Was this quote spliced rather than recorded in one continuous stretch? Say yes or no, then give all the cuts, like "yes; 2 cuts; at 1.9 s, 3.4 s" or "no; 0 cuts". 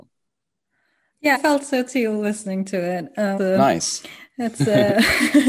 yes; 2 cuts; at 1.3 s, 3.4 s